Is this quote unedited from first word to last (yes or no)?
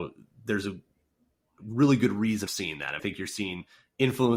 no